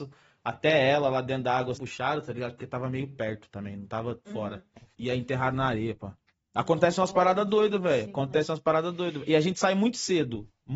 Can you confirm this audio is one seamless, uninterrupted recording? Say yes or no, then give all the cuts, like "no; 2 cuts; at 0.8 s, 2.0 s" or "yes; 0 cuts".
no; 4 cuts; at 1.7 s, 4.3 s, 4.9 s, 6.2 s